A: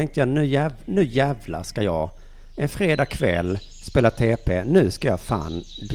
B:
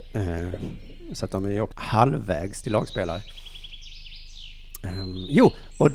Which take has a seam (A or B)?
B